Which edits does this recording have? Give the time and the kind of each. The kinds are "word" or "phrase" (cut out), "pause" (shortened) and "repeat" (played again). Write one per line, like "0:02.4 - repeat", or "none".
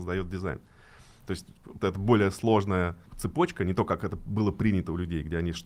0:01.8 - word